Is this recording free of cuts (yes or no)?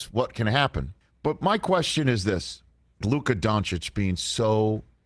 no